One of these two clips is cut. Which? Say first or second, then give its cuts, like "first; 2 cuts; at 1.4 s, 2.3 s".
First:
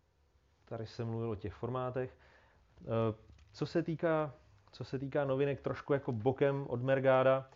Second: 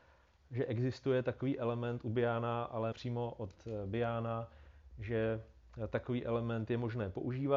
second; 1 cut; at 2.9 s